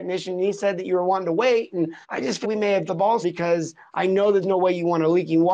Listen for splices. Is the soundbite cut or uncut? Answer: cut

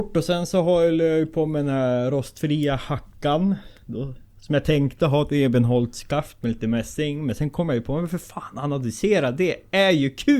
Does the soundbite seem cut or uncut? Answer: uncut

